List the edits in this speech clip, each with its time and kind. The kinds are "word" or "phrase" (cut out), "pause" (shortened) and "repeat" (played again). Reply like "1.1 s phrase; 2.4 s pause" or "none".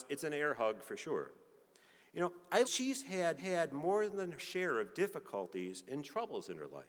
2.6 s phrase; 3.4 s repeat; 4.4 s phrase